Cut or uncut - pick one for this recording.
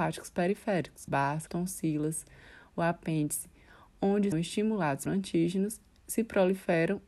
cut